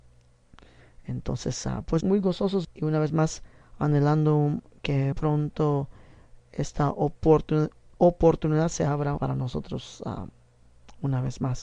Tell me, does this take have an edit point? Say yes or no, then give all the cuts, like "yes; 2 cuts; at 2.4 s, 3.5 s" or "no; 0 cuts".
yes; 4 cuts; at 2.0 s, 2.6 s, 5.1 s, 9.2 s